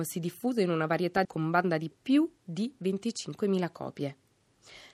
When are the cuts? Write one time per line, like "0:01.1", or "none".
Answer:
0:01.2
0:01.9